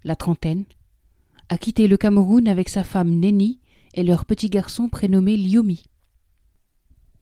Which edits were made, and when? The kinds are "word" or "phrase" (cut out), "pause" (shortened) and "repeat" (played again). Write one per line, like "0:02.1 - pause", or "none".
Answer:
none